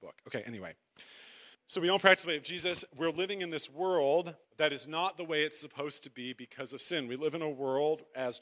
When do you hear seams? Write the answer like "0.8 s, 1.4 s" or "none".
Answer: 1.5 s, 4.4 s